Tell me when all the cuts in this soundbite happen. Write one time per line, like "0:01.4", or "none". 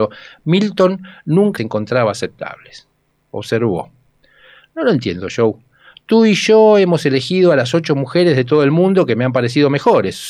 0:01.6